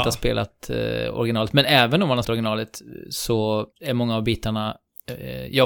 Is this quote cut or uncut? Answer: cut